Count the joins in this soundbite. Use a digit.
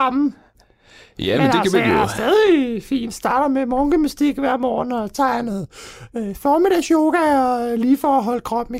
0